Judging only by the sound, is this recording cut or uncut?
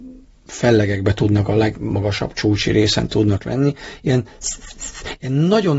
uncut